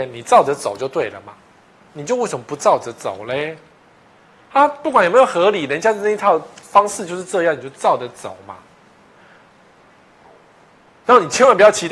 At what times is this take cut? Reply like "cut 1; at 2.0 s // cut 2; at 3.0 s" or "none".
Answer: none